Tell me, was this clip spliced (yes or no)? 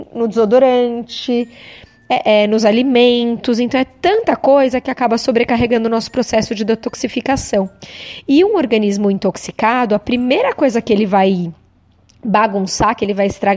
no